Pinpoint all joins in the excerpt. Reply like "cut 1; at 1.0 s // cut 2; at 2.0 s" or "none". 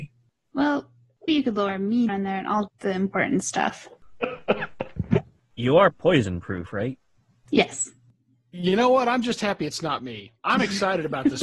cut 1; at 1.3 s // cut 2; at 2.1 s // cut 3; at 2.7 s